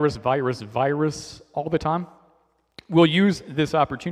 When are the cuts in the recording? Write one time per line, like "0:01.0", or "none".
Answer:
none